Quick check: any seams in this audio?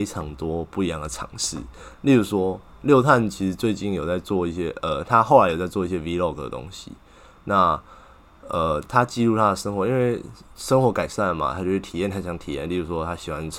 no; 0 cuts

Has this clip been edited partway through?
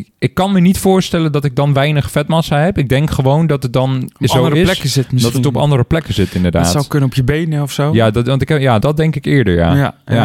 yes; 1 cut; at 8.8 s

